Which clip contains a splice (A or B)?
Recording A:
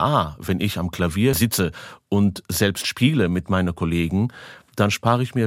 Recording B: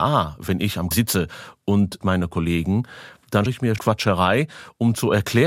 B